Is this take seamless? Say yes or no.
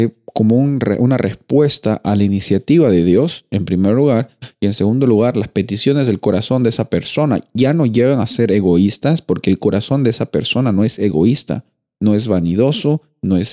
yes